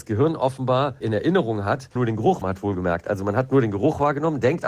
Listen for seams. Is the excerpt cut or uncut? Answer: cut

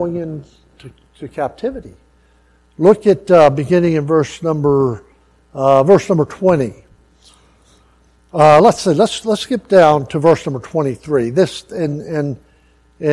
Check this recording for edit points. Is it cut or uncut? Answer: uncut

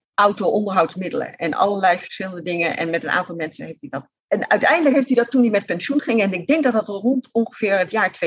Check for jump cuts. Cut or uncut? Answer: cut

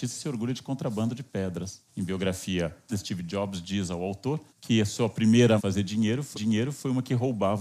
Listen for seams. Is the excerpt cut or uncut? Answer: cut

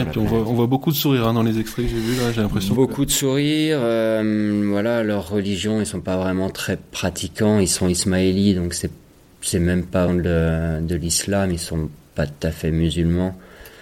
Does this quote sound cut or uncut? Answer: cut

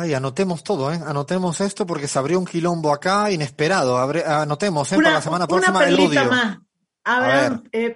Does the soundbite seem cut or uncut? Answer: uncut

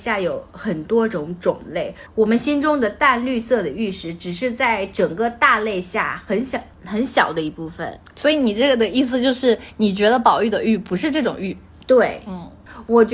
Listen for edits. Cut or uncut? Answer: uncut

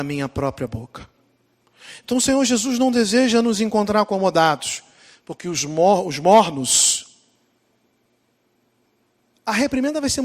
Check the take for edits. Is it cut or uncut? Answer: uncut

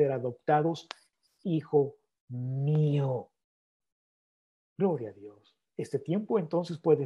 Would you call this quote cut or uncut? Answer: uncut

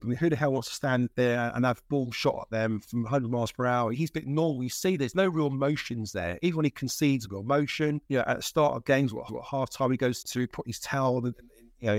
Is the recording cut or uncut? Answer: cut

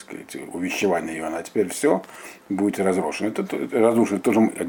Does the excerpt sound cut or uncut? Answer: uncut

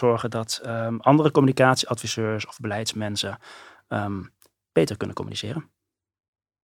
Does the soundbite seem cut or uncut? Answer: uncut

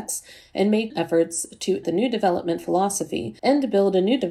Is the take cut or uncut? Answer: cut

